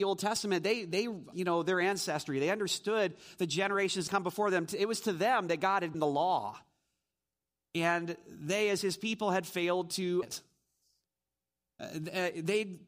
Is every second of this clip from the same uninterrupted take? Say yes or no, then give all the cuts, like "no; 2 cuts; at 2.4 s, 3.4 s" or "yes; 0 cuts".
no; 4 cuts; at 1.3 s, 4.1 s, 5.9 s, 10.2 s